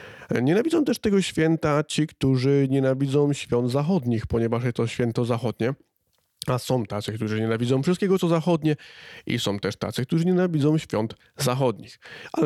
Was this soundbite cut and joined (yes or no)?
no